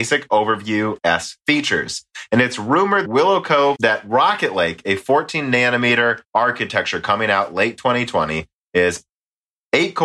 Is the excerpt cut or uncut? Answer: cut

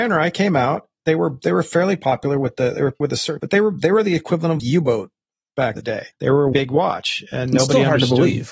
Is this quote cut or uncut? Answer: cut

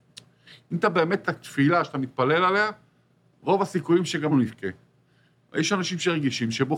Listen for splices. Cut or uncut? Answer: cut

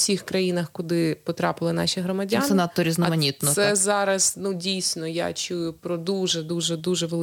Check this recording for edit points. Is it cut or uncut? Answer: uncut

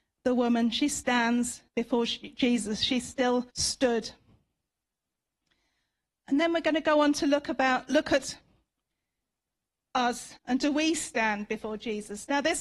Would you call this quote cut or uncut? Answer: cut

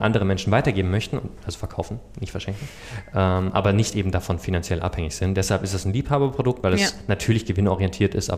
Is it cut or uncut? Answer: uncut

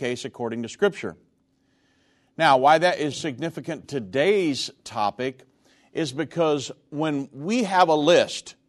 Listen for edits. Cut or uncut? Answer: cut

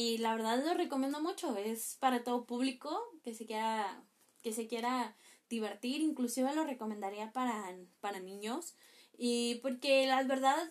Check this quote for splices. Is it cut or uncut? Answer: uncut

